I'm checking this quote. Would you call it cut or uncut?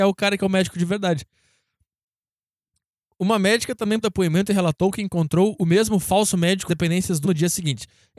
cut